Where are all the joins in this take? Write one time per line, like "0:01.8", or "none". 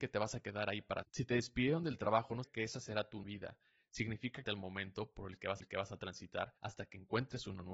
0:01.0
0:02.4
0:03.2
0:04.4
0:05.6
0:06.6